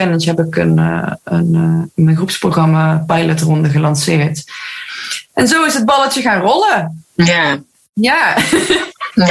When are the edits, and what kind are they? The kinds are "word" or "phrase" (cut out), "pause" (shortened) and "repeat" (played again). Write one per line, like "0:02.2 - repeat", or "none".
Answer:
none